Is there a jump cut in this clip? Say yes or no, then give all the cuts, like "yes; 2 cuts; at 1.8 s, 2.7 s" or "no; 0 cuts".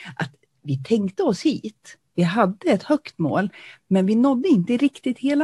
no; 0 cuts